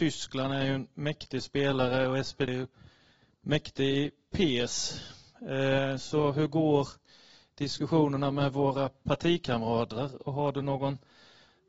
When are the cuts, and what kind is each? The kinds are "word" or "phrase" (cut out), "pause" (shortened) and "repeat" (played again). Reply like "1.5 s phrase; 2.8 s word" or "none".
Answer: 2.5 s word